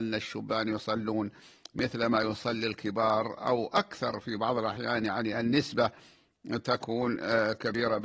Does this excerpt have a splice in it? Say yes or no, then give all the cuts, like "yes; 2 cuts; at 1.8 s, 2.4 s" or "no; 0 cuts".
no; 0 cuts